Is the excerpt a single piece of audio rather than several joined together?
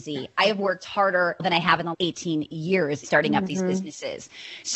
no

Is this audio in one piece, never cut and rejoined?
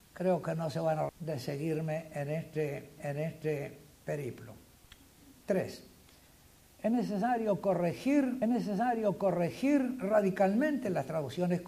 no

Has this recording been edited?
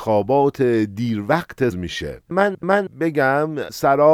yes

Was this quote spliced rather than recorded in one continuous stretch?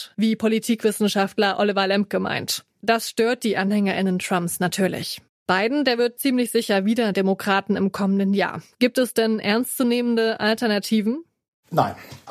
yes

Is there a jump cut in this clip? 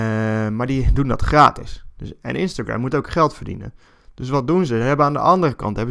no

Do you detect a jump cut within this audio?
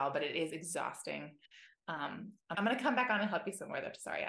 yes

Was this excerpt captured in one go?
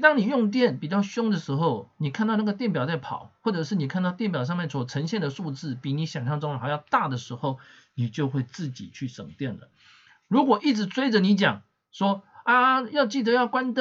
yes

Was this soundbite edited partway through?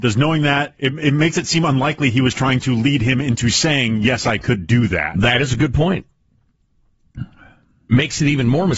no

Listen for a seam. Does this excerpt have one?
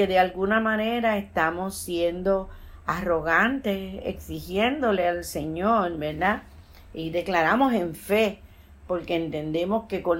no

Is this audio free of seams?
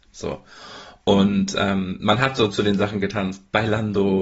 yes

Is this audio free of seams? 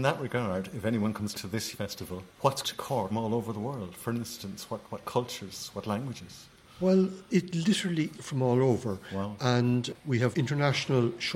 no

